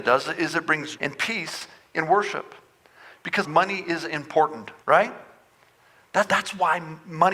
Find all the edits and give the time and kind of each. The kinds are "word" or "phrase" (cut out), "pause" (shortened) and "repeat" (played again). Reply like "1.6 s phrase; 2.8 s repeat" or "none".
1.0 s word; 3.4 s phrase; 4.8 s pause; 6.3 s word